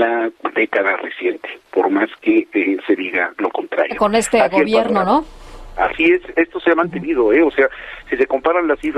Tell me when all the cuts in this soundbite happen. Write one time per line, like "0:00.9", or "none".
0:01.7